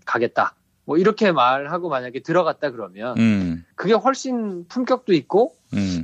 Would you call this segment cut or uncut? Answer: uncut